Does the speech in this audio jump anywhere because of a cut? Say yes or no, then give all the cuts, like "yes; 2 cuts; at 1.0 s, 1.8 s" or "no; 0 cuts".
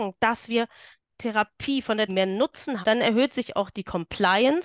yes; 3 cuts; at 1.0 s, 2.1 s, 2.8 s